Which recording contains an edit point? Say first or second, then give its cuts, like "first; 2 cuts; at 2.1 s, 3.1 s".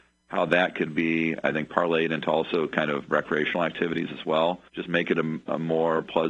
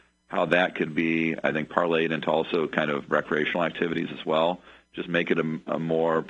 first; 1 cut; at 4.7 s